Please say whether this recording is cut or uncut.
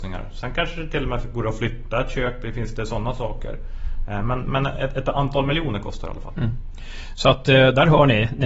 uncut